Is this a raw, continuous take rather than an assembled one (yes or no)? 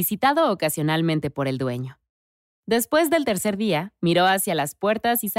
yes